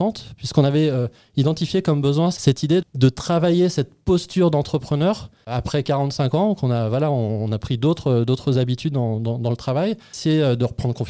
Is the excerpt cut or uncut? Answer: cut